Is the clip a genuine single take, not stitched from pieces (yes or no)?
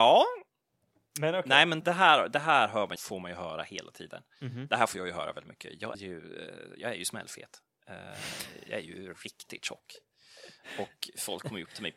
no